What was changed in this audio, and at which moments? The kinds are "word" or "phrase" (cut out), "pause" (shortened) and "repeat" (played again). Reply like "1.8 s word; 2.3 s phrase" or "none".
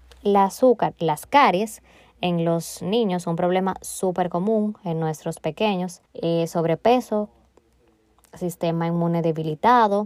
6.1 s pause